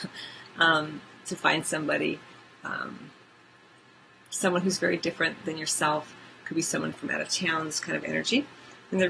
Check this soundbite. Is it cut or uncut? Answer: uncut